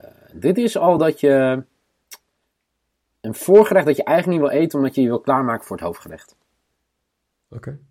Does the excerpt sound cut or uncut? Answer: uncut